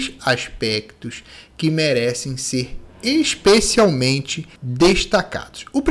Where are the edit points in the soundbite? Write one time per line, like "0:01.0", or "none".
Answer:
0:04.6